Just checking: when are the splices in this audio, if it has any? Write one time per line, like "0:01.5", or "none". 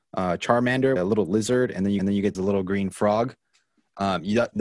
0:01.0
0:02.0
0:02.3